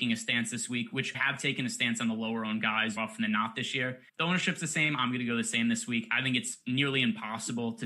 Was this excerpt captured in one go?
no; 3 cuts; at 1.1 s, 3.0 s, 4.1 s

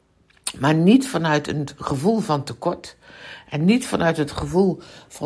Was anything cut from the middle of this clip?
no; 0 cuts

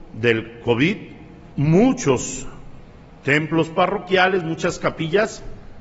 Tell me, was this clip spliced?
yes; 1 cut; at 1.5 s

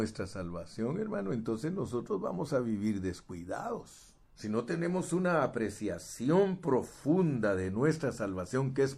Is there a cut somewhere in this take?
yes; 1 cut; at 4.2 s

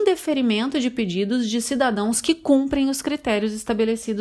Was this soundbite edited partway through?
no; 0 cuts

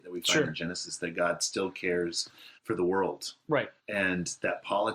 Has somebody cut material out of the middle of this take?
yes; 2 cuts; at 2.6 s, 3.8 s

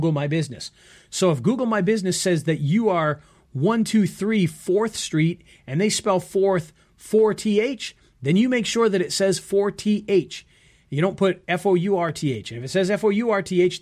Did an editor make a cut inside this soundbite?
no; 0 cuts

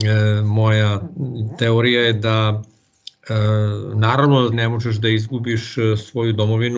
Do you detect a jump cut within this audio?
yes; 1 cut; at 4.5 s

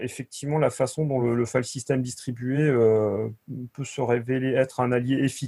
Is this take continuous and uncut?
yes; 0 cuts

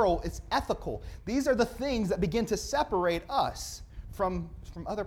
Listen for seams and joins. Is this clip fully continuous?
yes; 0 cuts

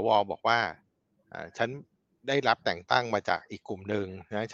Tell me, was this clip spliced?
no; 0 cuts

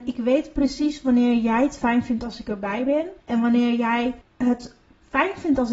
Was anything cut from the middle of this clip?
yes; 2 cuts; at 3.2 s, 4.2 s

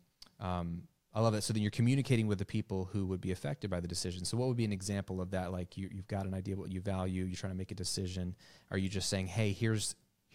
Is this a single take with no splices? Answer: yes; 0 cuts

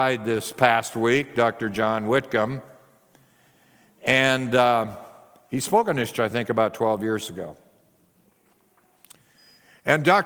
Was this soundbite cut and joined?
yes; 1 cut; at 6.1 s

